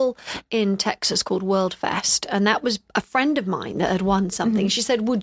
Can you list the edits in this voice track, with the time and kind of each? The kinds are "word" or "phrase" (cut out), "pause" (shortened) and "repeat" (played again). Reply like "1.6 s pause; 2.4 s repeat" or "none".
none